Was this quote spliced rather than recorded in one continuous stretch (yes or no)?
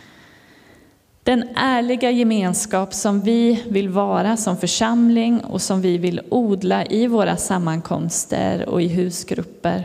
no